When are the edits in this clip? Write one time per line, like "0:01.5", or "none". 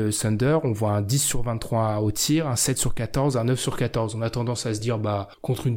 none